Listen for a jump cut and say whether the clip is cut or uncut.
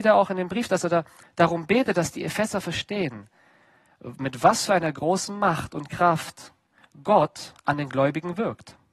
uncut